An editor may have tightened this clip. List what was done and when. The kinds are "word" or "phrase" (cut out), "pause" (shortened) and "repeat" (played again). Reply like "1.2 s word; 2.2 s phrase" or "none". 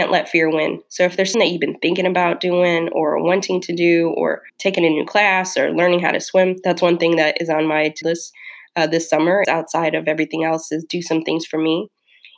1.3 s word; 4.5 s pause; 8.0 s word; 9.4 s word